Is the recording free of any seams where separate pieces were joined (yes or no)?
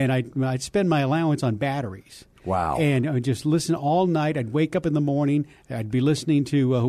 yes